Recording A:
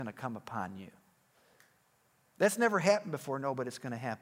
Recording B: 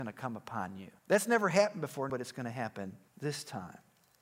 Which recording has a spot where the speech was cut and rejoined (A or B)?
B